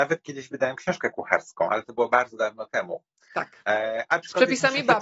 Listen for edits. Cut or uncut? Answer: uncut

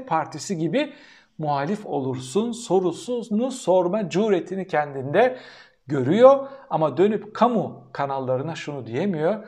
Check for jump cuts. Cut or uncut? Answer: uncut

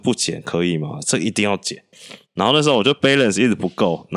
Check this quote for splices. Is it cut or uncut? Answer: uncut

